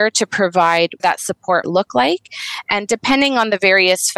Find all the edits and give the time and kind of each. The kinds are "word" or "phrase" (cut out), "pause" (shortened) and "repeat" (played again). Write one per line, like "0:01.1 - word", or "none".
0:01.0 - word
0:01.6 - word